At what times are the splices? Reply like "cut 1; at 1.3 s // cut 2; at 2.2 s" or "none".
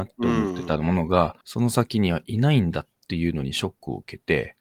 cut 1; at 1.4 s